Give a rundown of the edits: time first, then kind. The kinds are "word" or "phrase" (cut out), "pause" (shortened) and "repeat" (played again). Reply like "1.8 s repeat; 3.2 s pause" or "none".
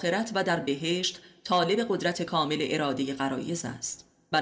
none